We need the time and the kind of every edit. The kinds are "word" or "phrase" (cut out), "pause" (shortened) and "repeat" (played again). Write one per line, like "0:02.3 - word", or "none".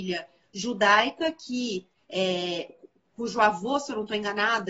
none